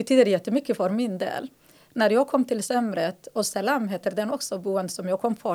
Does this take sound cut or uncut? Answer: uncut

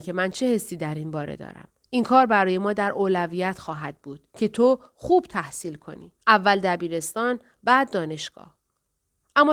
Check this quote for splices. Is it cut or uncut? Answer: cut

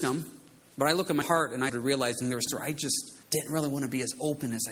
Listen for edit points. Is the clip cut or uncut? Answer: cut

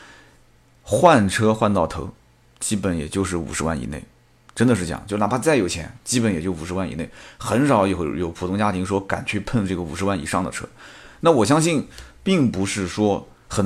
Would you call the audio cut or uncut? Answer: uncut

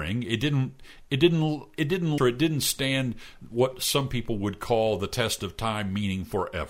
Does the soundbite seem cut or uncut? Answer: cut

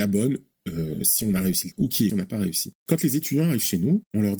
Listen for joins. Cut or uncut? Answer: cut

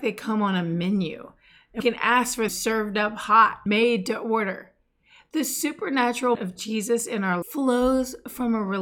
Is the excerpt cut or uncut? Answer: cut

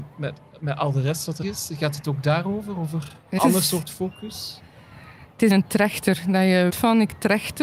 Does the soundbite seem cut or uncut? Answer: cut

